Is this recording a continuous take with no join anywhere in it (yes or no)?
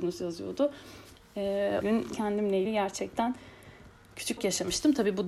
no